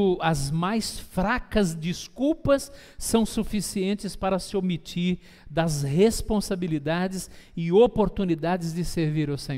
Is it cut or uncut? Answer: uncut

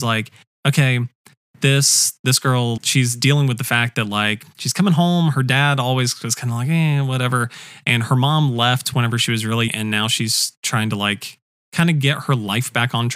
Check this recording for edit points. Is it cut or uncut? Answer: cut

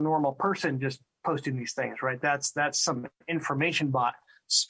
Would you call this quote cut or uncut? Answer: uncut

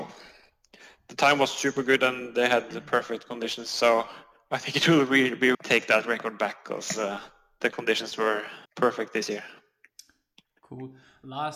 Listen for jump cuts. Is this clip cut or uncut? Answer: cut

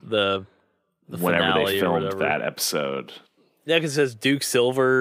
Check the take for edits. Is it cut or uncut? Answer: uncut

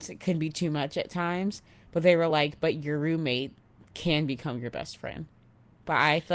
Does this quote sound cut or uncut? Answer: uncut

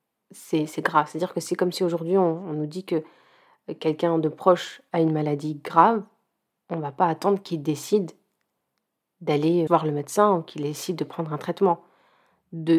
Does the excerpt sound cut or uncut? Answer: cut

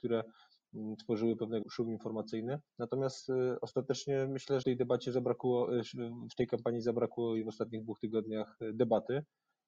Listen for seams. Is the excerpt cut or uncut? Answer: cut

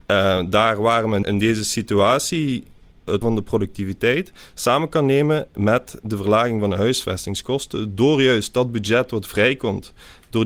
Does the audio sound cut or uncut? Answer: cut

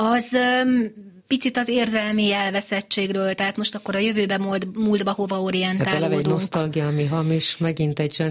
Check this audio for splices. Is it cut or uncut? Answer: cut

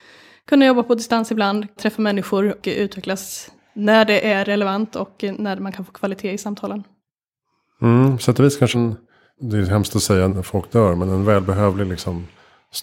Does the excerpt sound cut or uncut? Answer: cut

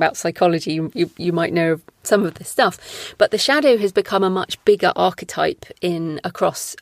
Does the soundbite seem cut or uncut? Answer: uncut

